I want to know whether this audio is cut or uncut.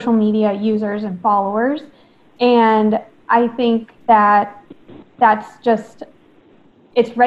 cut